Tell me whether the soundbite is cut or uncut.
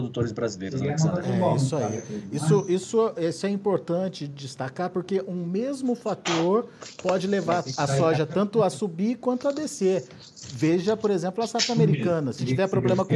uncut